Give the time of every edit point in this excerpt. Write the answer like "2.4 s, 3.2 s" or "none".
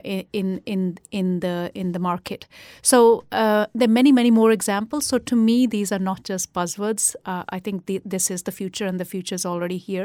none